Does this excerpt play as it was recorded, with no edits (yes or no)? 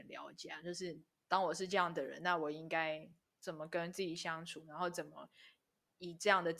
yes